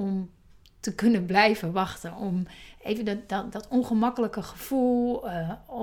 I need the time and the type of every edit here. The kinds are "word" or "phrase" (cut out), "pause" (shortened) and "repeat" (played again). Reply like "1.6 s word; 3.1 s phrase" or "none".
none